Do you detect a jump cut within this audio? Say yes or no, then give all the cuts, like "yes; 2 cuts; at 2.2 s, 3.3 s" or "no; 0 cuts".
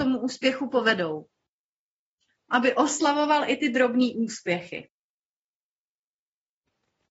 yes; 1 cut; at 2.5 s